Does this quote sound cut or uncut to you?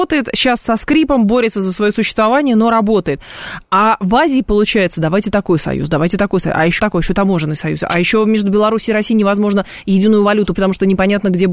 cut